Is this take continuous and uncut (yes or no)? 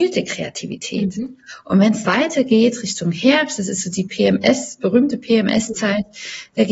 no